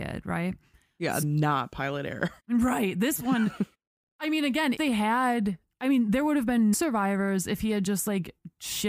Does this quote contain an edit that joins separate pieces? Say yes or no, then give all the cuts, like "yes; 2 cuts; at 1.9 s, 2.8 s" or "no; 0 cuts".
yes; 5 cuts; at 1.2 s, 2.4 s, 3.7 s, 4.8 s, 6.7 s